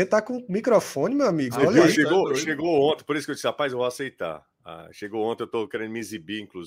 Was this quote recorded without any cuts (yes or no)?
yes